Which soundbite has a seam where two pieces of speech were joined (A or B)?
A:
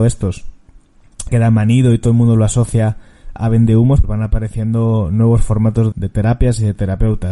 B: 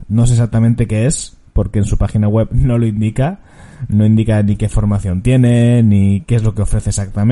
A